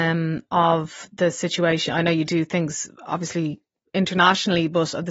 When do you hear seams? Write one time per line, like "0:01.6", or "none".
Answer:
none